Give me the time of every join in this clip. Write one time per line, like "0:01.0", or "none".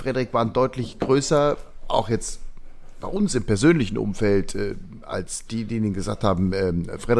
none